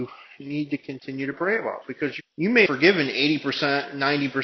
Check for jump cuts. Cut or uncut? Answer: cut